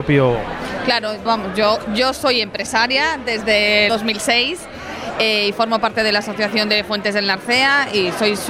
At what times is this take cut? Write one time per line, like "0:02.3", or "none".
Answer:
0:01.3
0:03.9